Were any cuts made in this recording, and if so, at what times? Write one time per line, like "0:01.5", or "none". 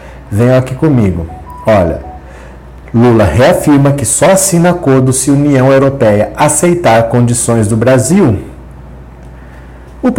none